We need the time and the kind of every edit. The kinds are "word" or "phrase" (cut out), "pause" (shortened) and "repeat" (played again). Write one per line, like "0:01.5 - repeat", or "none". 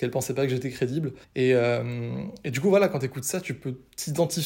0:01.2 - pause